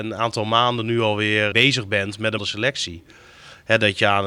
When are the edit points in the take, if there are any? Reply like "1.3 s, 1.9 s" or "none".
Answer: 1.5 s, 2.4 s